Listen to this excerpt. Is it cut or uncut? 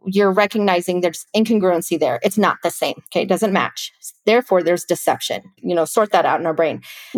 cut